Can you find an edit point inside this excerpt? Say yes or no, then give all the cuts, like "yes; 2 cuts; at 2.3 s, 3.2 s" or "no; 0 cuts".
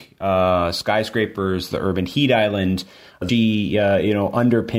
yes; 1 cut; at 3.3 s